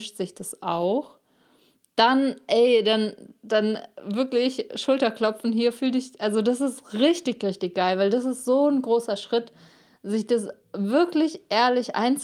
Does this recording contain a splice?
no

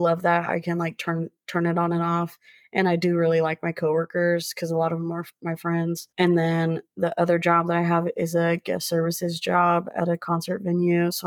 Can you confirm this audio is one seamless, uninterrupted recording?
no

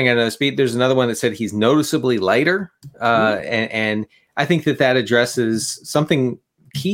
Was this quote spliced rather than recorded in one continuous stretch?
no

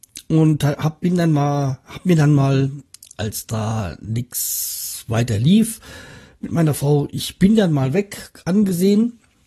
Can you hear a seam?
no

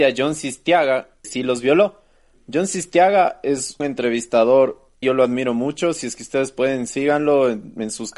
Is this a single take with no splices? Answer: no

